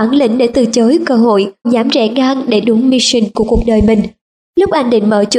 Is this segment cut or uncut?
cut